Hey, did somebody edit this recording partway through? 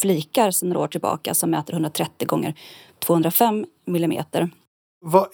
no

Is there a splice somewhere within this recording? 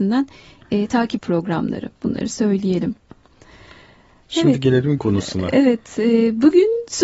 yes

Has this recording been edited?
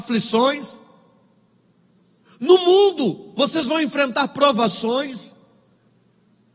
no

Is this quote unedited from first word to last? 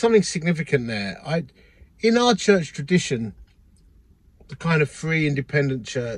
yes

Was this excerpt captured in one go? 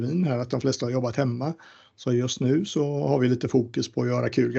yes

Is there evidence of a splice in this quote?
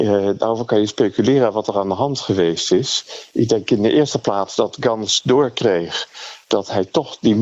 no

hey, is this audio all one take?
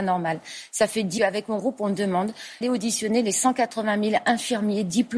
no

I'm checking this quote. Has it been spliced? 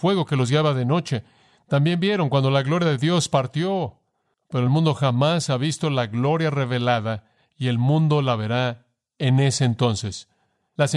no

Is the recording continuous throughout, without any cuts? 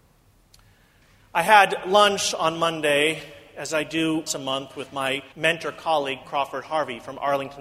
no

